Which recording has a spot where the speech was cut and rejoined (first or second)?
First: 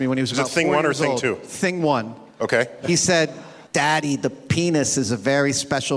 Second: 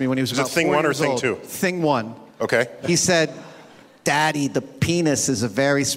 first